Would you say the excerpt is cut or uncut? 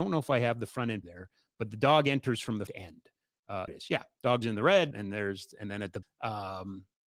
cut